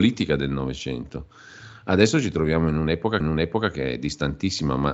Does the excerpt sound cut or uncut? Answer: cut